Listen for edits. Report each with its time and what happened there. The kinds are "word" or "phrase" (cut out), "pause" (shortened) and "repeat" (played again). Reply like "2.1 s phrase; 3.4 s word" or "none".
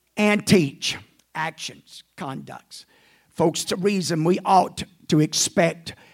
1.2 s pause; 3.6 s word